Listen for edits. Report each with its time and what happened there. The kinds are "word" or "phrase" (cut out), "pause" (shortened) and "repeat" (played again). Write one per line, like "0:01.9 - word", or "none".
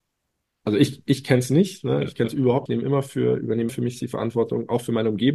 0:02.7 - word
0:03.7 - word
0:04.0 - word